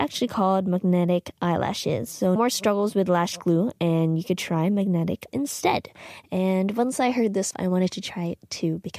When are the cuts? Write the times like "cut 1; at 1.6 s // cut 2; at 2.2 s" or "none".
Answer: cut 1; at 2.4 s // cut 2; at 5.3 s // cut 3; at 7.5 s